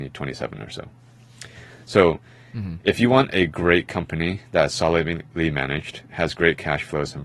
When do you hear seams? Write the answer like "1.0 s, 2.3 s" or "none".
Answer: none